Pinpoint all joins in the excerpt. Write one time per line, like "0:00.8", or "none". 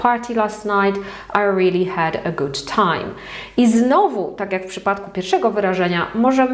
none